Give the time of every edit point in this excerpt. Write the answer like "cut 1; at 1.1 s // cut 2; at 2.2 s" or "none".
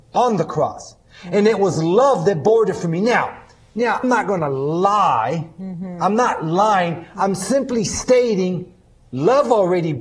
cut 1; at 4.0 s